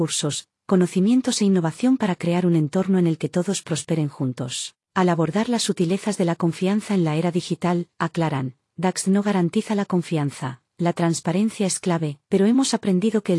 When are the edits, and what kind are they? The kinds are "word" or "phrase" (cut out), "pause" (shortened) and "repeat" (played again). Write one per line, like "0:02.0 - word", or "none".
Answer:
0:04.8 - pause
0:12.2 - pause